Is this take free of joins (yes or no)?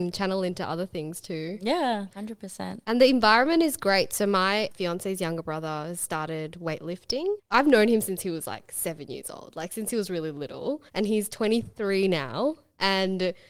no